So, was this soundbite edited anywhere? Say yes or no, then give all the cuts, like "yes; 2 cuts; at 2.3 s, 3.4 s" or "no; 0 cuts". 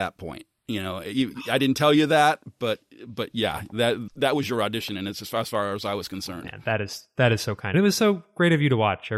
yes; 2 cuts; at 4.1 s, 7.7 s